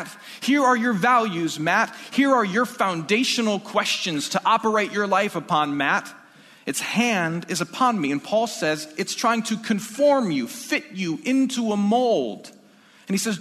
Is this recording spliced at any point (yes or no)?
no